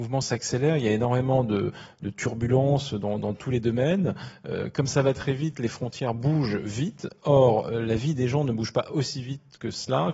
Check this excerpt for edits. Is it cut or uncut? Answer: uncut